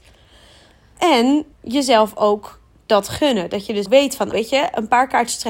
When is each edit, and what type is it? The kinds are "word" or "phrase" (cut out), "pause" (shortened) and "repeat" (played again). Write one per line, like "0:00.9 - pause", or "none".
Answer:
0:01.5 - pause
0:03.9 - word
0:04.3 - word